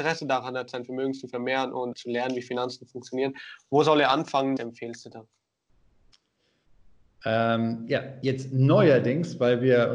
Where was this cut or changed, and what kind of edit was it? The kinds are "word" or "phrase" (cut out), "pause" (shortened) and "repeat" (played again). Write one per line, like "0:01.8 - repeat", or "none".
0:01.9 - word
0:04.6 - word

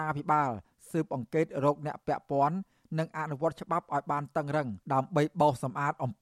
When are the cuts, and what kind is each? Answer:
0:04.8 - pause

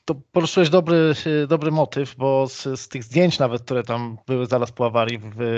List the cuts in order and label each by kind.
none

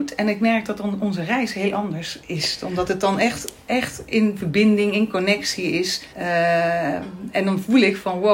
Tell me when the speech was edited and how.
0:06.1 - pause

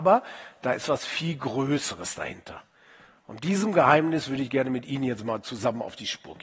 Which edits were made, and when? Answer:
none

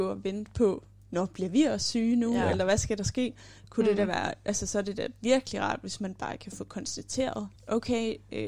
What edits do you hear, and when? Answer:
0:07.6 - pause

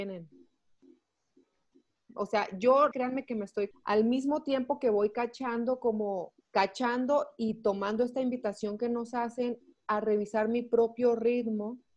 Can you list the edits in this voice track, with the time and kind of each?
0:02.9 - word
0:03.7 - phrase
0:06.4 - pause

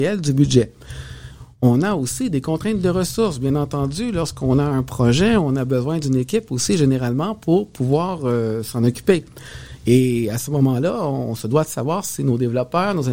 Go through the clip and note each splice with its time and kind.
none

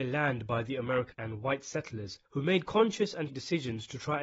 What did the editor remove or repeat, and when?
0:01.1 - word
0:02.2 - pause
0:03.3 - word

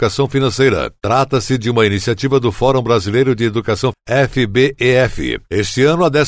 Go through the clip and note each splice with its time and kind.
0:03.9 - word

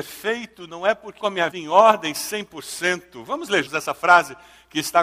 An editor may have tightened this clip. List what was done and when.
0:01.2 - phrase
0:01.5 - word
0:03.7 - word

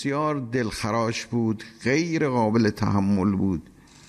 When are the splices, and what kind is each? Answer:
none

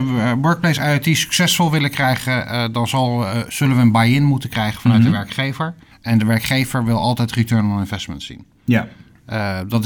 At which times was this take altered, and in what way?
0:05.9 - pause

